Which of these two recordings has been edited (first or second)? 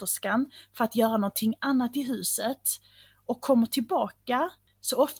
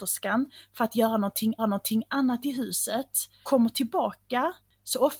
second